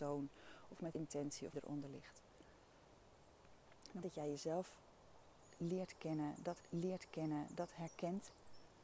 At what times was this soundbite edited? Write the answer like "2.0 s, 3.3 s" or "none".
0.9 s, 1.5 s, 4.0 s, 6.6 s